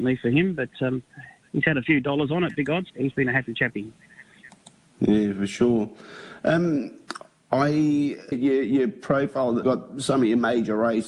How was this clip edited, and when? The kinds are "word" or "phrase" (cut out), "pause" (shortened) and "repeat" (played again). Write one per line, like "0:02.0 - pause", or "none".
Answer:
0:02.9 - word
0:08.3 - word
0:09.6 - word